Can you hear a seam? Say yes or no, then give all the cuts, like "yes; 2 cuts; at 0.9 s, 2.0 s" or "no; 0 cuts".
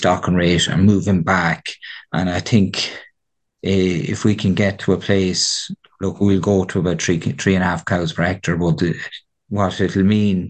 no; 0 cuts